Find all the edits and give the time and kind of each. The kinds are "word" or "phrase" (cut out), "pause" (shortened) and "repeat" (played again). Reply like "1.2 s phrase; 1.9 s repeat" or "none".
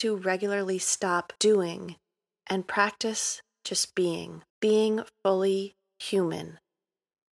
1.4 s pause; 4.5 s pause